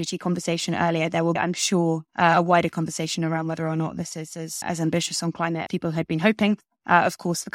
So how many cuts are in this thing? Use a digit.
4